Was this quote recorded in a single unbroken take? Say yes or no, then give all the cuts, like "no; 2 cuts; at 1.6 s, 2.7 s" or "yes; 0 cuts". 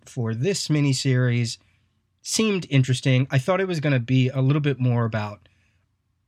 yes; 0 cuts